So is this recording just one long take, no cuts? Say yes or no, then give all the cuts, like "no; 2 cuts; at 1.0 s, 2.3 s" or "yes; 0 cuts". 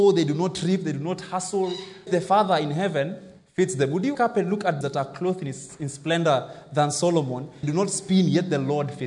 no; 4 cuts; at 2.1 s, 4.1 s, 4.8 s, 7.6 s